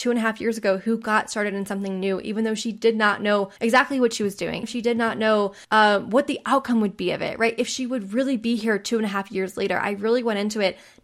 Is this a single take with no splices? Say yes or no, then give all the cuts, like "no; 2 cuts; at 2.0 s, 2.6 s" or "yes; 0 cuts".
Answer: no; 3 cuts; at 3.6 s, 4.6 s, 5.6 s